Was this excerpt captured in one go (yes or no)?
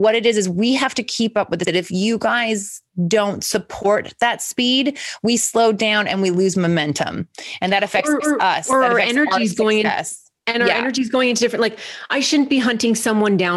no